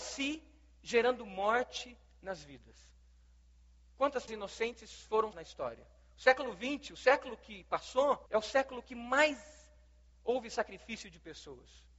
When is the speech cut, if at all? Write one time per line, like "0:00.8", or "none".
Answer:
0:04.3
0:05.3
0:08.3